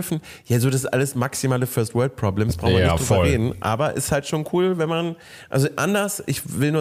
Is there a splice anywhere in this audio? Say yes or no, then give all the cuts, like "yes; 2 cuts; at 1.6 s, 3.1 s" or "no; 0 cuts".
no; 0 cuts